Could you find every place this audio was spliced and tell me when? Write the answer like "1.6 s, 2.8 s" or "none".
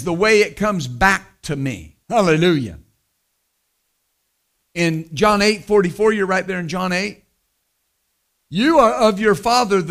2.0 s